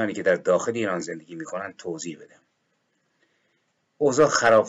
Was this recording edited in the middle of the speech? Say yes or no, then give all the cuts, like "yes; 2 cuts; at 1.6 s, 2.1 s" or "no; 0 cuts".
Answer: no; 0 cuts